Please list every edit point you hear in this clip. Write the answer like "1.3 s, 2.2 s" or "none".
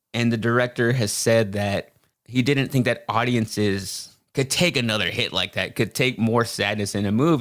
2.1 s